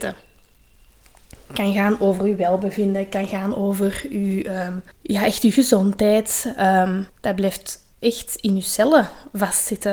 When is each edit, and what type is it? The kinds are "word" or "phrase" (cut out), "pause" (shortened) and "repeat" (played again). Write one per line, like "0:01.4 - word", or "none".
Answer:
0:04.9 - pause
0:07.1 - pause
0:07.9 - pause